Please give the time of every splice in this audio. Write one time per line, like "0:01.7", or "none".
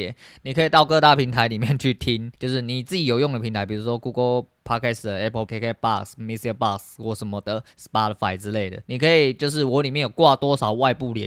0:02.4
0:05.5
0:08.8